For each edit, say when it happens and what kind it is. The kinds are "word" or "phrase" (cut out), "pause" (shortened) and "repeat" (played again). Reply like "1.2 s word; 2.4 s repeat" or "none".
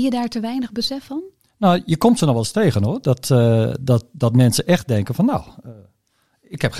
none